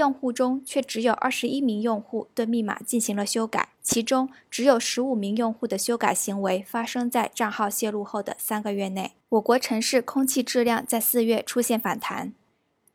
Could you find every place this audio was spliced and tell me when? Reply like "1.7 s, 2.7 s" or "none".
3.7 s, 9.2 s